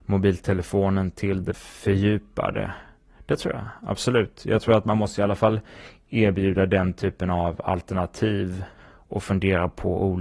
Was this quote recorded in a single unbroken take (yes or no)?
no